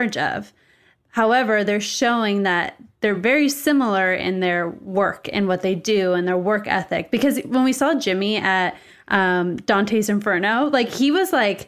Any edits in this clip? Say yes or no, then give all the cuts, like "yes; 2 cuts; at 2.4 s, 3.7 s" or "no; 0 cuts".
no; 0 cuts